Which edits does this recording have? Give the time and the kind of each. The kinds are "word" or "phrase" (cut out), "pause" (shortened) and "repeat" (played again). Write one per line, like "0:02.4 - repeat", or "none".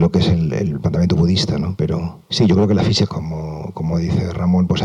0:02.3 - pause
0:03.1 - phrase